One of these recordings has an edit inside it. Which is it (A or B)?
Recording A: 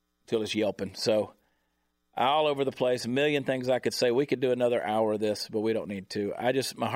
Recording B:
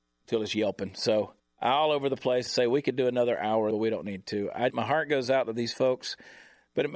B